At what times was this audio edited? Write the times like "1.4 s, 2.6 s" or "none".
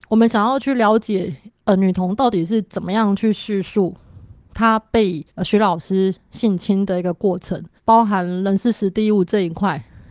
5.3 s, 7.8 s